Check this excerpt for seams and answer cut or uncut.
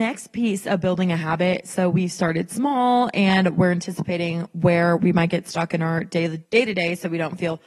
cut